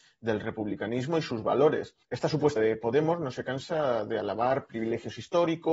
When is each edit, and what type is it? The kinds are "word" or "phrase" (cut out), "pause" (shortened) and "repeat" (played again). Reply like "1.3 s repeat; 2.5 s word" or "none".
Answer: 2.0 s pause; 2.6 s word